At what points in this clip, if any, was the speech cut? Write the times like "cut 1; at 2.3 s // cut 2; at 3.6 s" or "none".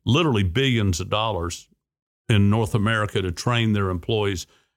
none